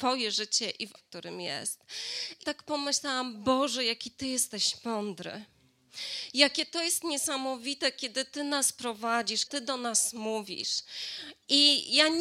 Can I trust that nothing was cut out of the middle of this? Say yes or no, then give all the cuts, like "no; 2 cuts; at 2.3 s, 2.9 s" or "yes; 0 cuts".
no; 3 cuts; at 1.0 s, 2.4 s, 9.5 s